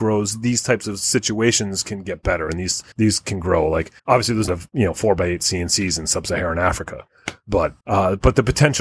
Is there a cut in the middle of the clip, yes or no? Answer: yes